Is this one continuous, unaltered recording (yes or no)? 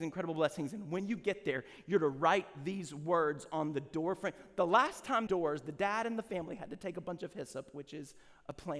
no